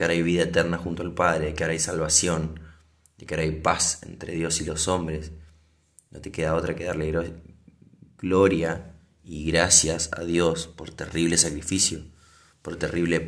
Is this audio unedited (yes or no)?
yes